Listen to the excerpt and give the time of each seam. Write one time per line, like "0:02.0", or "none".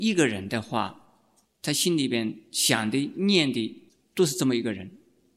0:01.5
0:03.9